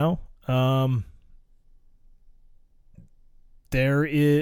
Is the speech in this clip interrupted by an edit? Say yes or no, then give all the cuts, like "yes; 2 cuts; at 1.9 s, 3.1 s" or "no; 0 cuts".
no; 0 cuts